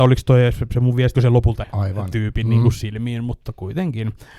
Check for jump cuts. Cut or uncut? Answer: cut